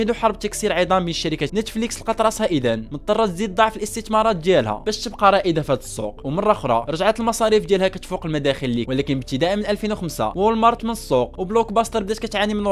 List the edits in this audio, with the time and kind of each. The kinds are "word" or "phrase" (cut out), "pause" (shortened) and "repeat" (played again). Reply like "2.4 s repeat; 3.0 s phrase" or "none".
1.5 s word; 8.9 s word; 10.8 s word